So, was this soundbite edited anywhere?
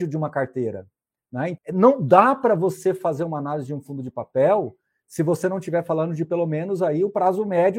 yes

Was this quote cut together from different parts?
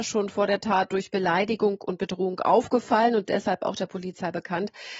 no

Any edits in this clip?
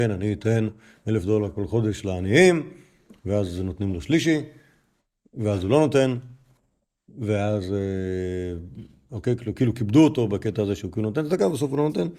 no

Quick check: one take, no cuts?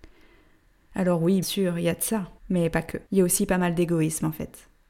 no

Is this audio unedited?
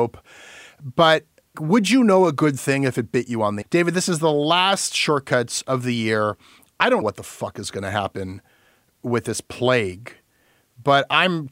no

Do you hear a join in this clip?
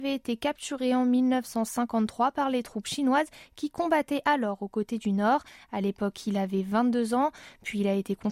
no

